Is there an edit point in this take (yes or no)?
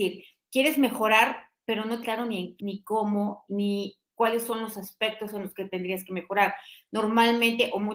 yes